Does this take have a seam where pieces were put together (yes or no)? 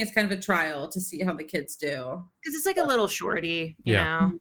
no